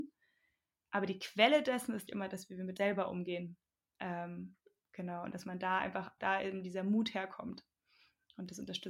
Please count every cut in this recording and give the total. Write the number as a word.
three